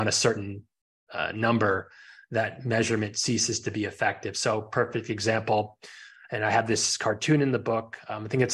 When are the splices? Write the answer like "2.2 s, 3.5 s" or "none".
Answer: none